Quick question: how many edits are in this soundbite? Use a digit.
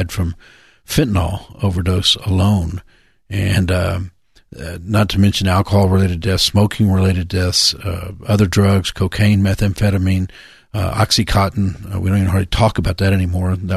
0